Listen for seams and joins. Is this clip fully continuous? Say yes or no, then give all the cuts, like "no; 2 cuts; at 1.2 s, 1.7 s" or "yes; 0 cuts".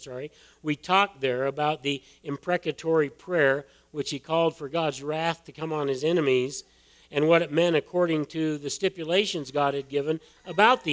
yes; 0 cuts